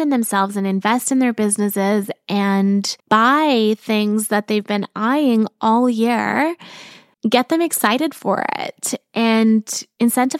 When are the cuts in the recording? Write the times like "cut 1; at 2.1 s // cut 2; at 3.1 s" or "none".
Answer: cut 1; at 3.0 s // cut 2; at 7.1 s